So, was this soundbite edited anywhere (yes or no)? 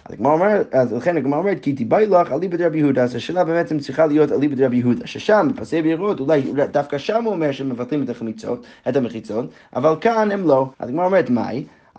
yes